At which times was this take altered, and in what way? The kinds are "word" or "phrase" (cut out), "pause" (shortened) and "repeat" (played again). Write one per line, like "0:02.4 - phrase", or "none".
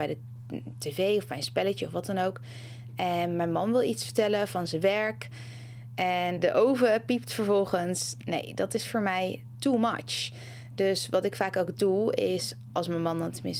0:06.4 - word